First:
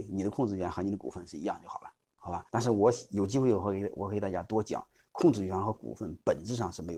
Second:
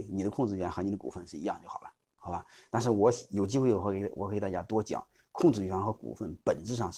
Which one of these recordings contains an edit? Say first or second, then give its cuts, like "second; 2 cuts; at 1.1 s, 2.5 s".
first; 1 cut; at 2.5 s